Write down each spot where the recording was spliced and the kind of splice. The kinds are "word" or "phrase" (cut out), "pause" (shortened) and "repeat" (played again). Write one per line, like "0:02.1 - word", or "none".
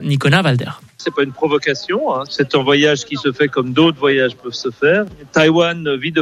none